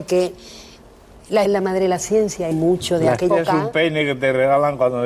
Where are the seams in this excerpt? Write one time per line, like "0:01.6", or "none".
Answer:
0:01.5
0:02.5
0:03.3